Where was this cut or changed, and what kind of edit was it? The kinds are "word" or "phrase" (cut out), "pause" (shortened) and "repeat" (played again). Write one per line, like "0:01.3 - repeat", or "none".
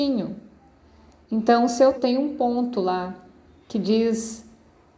0:01.9 - word

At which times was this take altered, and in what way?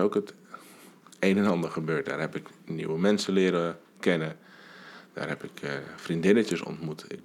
none

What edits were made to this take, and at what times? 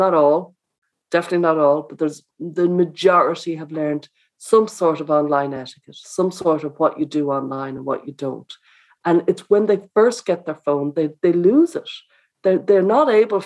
none

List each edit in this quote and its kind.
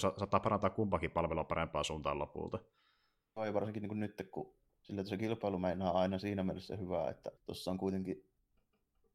0:04.7 - pause
0:07.4 - pause

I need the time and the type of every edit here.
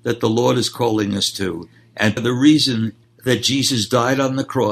0:02.2 - word
0:03.0 - pause

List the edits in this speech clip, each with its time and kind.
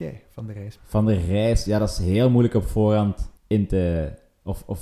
0:03.4 - pause

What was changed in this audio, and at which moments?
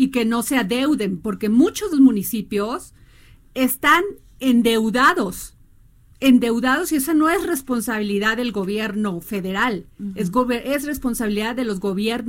0:01.9 - word

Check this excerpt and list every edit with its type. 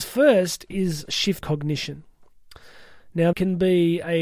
0:01.1 - word
0:01.4 - word
0:03.3 - word

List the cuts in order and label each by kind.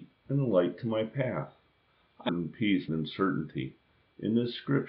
0:02.3 - phrase
0:02.9 - phrase

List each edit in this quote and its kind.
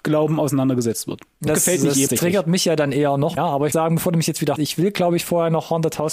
0:01.5 - word
0:02.1 - word
0:03.4 - word
0:03.7 - word
0:04.6 - word

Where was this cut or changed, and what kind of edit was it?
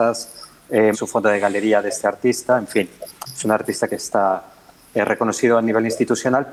0:00.9 - phrase
0:03.9 - phrase

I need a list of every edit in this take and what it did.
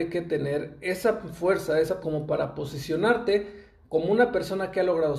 0:02.0 - word

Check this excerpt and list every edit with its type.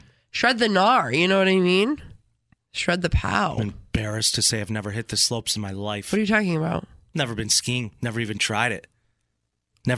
none

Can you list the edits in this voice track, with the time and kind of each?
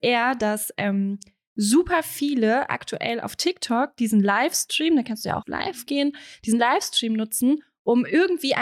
0:05.4 - word

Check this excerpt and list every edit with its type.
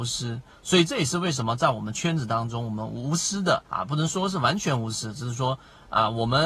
0:03.7 - pause

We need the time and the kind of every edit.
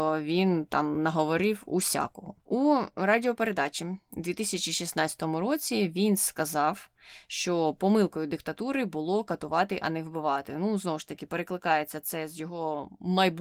0:02.4 - pause

